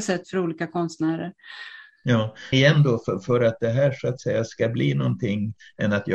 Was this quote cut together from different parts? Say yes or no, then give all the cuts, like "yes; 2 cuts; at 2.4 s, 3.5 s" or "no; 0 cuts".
yes; 1 cut; at 2.5 s